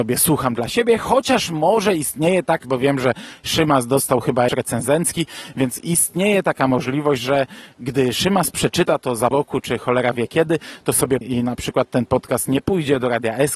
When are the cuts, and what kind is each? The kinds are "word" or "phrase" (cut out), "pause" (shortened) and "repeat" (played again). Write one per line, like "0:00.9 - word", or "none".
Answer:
0:02.6 - word
0:04.5 - word
0:09.3 - word
0:11.2 - word